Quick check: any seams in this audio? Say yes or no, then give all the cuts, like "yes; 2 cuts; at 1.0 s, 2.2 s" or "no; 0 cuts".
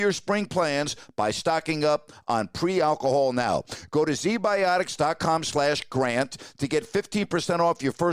no; 0 cuts